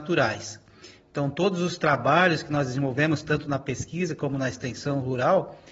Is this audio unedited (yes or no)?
yes